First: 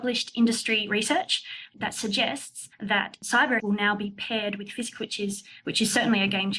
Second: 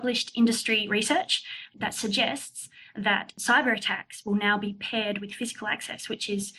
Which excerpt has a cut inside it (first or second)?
first